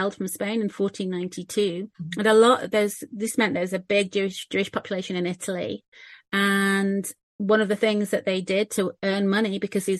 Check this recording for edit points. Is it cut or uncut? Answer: cut